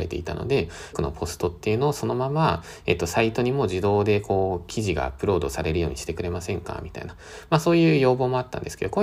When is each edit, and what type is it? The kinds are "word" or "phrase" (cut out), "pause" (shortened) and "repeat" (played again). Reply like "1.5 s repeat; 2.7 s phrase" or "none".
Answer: 0.9 s word